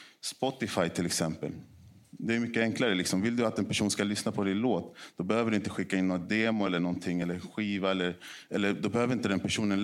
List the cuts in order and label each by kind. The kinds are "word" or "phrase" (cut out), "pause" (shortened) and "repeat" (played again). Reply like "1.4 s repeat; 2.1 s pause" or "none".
none